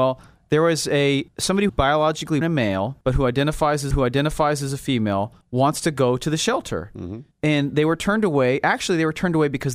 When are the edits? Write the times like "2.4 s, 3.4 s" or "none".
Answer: 1.3 s, 1.7 s, 2.4 s, 3.0 s, 3.9 s, 5.4 s, 7.3 s